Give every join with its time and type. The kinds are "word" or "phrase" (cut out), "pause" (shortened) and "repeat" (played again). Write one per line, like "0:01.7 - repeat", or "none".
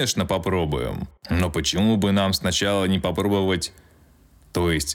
0:01.2 - pause